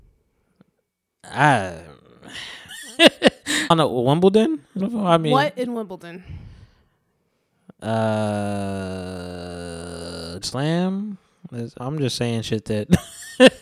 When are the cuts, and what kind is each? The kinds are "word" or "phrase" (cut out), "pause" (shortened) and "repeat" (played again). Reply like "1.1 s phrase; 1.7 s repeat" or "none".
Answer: 2.7 s word; 3.7 s word; 4.8 s word; 10.4 s word; 11.8 s word